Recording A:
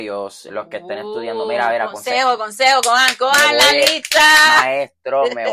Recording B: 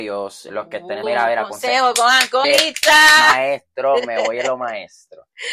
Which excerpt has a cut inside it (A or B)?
B